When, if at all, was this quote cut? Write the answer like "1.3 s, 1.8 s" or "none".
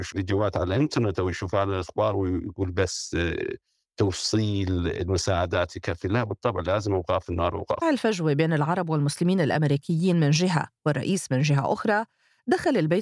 7.8 s

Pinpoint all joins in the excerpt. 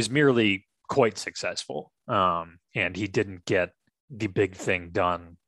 none

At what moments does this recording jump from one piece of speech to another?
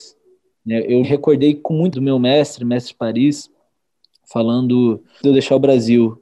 1.0 s, 1.9 s, 5.2 s

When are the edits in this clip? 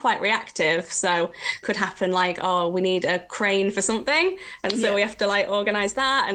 1.6 s

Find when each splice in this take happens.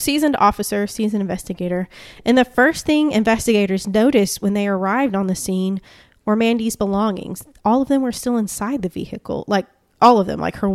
none

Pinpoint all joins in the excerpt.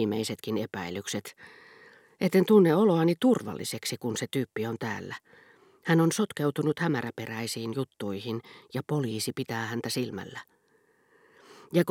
none

